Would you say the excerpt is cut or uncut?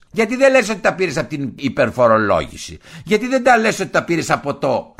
uncut